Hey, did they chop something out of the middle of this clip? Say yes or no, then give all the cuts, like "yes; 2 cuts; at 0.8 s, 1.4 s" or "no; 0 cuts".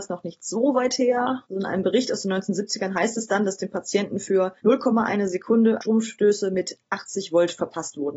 yes; 2 cuts; at 1.4 s, 4.6 s